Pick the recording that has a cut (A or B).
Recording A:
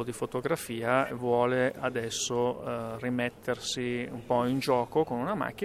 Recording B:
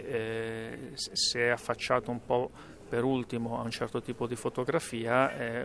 A